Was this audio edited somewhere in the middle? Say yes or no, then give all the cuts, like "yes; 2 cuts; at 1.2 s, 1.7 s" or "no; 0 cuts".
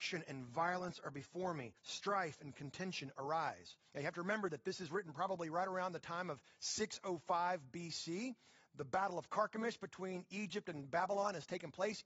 yes; 2 cuts; at 1.8 s, 3.9 s